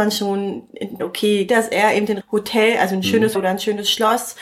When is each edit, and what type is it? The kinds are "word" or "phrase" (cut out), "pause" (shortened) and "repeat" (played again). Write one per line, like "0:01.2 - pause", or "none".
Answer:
0:01.0 - word
0:01.5 - word
0:02.2 - word
0:03.3 - word